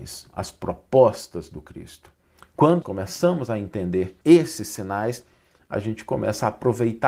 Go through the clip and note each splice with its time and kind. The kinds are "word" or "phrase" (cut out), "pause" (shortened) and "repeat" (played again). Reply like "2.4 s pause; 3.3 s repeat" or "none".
2.8 s word; 4.2 s pause